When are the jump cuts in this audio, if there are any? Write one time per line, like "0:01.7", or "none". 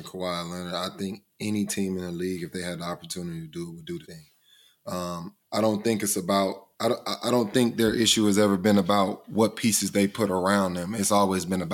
0:04.0
0:05.4
0:06.7